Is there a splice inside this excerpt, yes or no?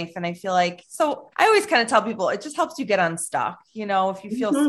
yes